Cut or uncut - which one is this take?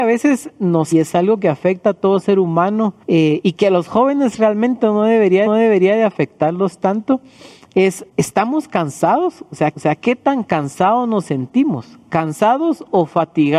cut